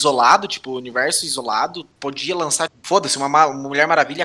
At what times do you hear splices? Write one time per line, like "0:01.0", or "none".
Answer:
0:01.9
0:02.7